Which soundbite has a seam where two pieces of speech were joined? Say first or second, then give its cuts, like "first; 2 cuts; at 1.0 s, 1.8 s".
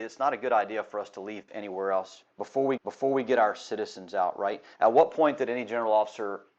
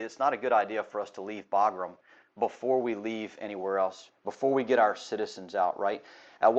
first; 3 cuts; at 1.5 s, 2.8 s, 4.7 s